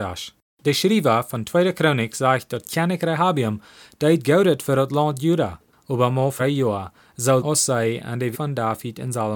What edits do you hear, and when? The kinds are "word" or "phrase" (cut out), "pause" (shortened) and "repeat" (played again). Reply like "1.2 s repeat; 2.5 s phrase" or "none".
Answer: 6.4 s word; 7.4 s word; 8.3 s word